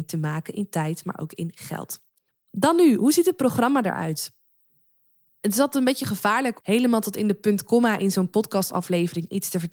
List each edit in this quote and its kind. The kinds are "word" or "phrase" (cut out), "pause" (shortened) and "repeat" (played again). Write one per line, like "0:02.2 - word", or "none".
0:02.3 - pause
0:06.6 - word